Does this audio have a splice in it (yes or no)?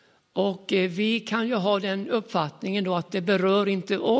no